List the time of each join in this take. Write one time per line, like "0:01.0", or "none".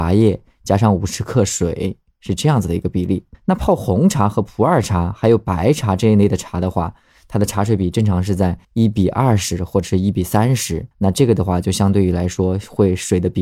0:03.3
0:08.6
0:10.9